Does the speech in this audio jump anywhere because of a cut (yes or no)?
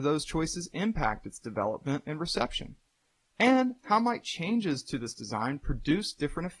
no